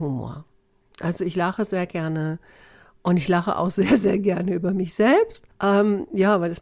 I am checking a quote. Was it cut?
no; 0 cuts

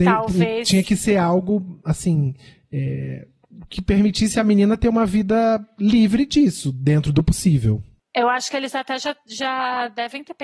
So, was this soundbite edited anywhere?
no; 0 cuts

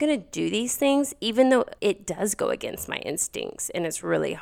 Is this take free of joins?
no; 1 cut; at 1.8 s

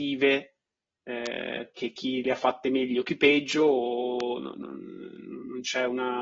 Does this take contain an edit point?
no; 0 cuts

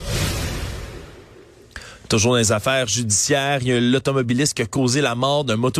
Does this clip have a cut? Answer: no; 0 cuts

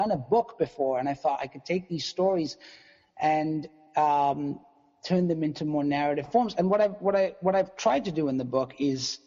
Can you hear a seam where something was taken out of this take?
no; 0 cuts

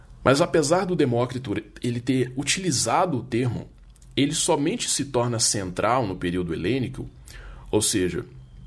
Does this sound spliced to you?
no; 0 cuts

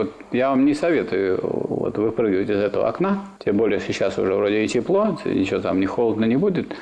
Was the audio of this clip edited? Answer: yes; 1 cut; at 3.4 s

